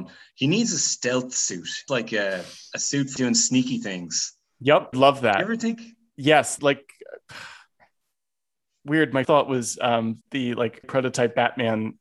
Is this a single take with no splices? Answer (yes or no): no